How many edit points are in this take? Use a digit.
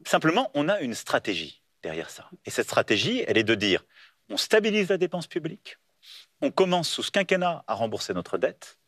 0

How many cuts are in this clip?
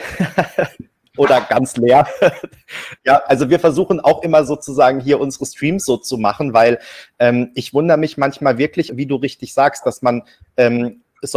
2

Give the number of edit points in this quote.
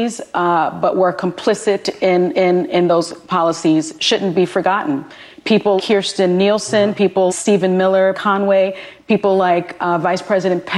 4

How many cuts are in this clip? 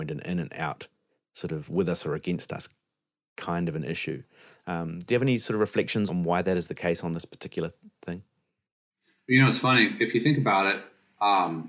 1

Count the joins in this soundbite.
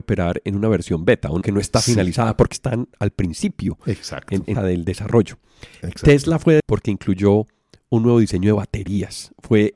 5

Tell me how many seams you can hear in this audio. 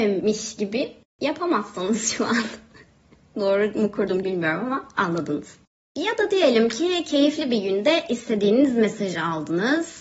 1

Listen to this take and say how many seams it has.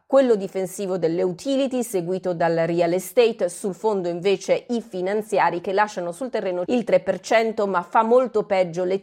1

